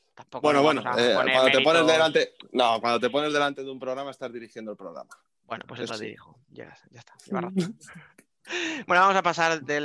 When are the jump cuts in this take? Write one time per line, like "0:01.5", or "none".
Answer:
0:05.9